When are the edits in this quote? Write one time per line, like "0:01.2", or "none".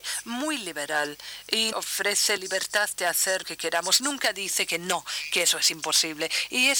0:01.7
0:02.4
0:03.4